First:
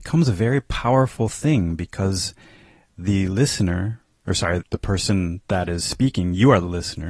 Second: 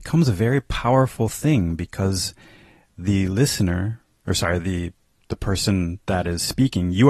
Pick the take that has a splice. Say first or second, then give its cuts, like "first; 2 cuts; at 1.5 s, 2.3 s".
first; 1 cut; at 4.6 s